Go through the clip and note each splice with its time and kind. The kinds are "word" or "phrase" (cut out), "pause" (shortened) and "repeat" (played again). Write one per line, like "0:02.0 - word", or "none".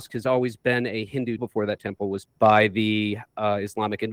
0:01.4 - word
0:01.8 - word
0:02.2 - word